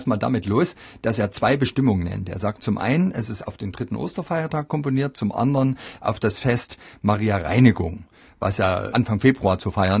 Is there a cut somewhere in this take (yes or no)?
no